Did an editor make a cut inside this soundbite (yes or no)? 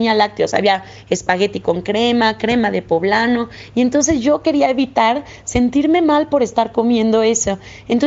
no